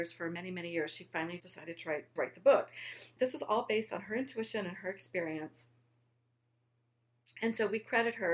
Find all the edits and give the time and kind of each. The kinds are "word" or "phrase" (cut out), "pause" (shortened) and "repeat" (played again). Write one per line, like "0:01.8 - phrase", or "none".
0:01.4 - word
0:02.2 - word
0:03.2 - word